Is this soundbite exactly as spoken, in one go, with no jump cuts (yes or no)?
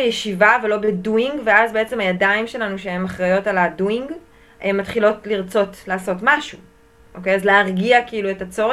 yes